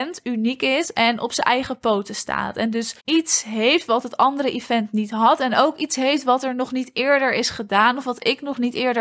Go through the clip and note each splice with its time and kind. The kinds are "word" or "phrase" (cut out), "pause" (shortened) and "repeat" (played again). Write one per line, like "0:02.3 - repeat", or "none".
0:03.0 - pause